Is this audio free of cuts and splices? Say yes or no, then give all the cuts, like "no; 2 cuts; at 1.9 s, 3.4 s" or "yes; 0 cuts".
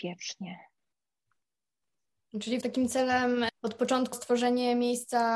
no; 3 cuts; at 2.6 s, 3.5 s, 4.1 s